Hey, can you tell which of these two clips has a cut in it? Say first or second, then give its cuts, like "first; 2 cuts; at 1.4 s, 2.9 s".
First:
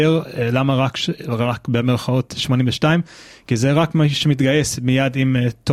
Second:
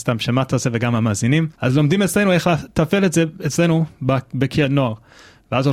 second; 1 cut; at 1.5 s